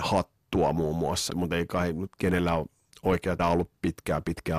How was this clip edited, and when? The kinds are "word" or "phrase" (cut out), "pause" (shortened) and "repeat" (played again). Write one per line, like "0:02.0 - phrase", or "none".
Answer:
0:01.3 - word
0:03.4 - word